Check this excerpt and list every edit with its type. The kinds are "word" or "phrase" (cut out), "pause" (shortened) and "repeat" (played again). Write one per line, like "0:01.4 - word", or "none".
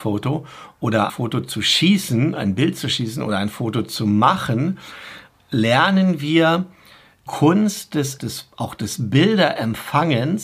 0:01.1 - word
0:07.3 - word
0:08.2 - word